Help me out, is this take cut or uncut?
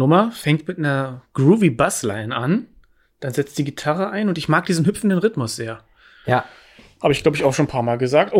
uncut